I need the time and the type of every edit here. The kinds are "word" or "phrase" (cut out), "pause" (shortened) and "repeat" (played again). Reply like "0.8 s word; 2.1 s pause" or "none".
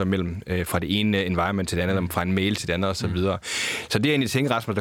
none